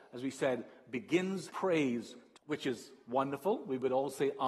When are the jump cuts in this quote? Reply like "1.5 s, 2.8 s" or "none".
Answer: 1.5 s, 2.4 s